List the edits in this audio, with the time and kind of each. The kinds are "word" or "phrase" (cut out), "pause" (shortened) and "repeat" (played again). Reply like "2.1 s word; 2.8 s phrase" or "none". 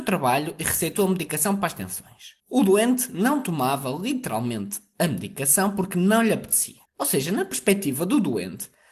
2.4 s pause; 6.9 s pause